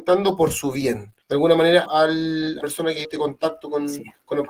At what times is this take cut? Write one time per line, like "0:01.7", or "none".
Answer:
0:01.2
0:01.9
0:02.6
0:03.0